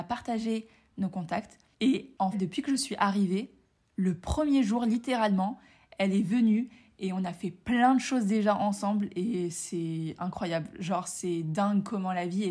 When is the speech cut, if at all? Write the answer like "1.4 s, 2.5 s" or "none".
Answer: 2.3 s